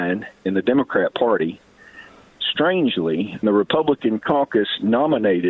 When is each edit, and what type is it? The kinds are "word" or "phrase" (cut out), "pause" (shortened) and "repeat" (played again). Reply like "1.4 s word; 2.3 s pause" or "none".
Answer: 2.4 s word; 3.4 s word

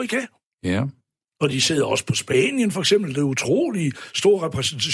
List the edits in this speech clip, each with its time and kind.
none

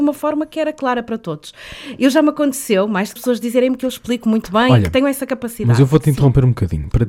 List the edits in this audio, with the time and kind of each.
3.2 s phrase

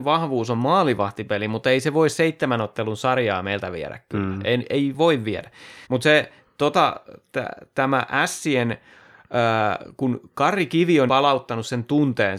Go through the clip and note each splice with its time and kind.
5.8 s pause; 11.1 s word

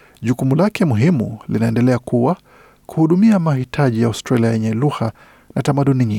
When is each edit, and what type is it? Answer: none

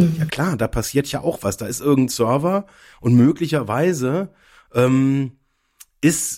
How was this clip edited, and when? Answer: none

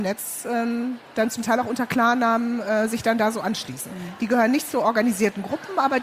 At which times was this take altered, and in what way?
none

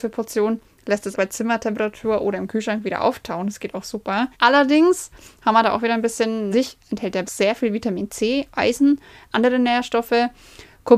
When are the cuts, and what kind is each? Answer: 1.1 s word; 4.3 s pause; 6.5 s phrase; 7.2 s word

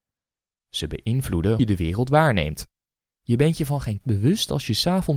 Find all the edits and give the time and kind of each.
1.6 s word; 4.0 s word

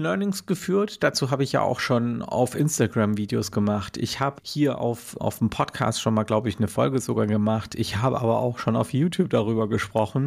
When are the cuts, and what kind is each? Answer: 4.4 s word; 5.2 s word

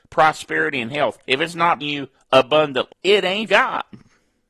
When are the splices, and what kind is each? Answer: 1.2 s pause; 1.8 s word; 2.9 s word; 3.5 s word

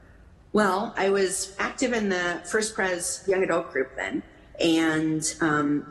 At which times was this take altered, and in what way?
none

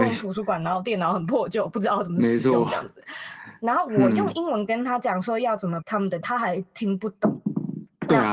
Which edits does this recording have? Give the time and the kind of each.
5.8 s word; 6.2 s word

